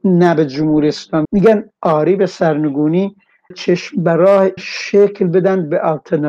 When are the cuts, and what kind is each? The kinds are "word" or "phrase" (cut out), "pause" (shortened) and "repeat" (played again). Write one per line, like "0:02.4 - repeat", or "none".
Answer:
0:01.2 - word
0:03.5 - word
0:04.6 - word